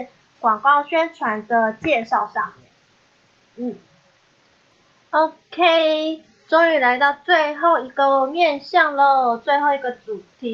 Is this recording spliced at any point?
no; 0 cuts

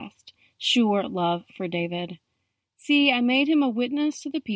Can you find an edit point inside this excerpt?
no; 0 cuts

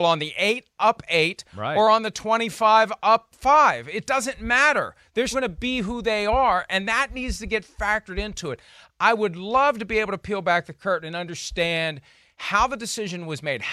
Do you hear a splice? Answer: yes; 1 cut; at 5.3 s

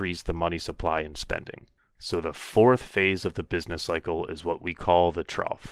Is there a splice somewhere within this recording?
no; 0 cuts

